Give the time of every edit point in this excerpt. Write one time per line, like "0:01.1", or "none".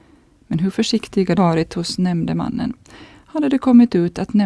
0:01.4